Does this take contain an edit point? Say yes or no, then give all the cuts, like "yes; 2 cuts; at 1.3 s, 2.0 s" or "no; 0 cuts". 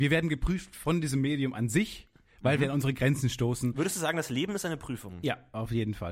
no; 0 cuts